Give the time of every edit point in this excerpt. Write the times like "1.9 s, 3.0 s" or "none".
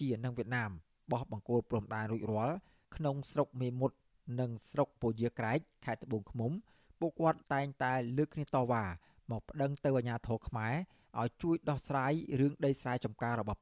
7.4 s